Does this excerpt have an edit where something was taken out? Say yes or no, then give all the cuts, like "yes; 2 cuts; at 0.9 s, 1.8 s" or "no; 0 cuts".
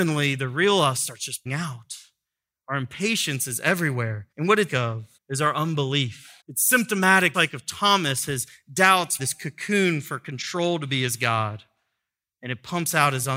yes; 7 cuts; at 1.5 s, 4.3 s, 4.7 s, 5.2 s, 6.4 s, 7.3 s, 9.2 s